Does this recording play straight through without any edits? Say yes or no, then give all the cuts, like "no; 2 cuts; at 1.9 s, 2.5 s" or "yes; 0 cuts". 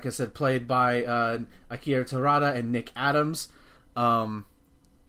yes; 0 cuts